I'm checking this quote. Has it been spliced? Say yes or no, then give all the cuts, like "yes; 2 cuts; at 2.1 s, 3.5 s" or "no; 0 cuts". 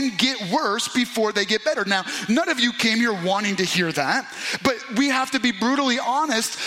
no; 0 cuts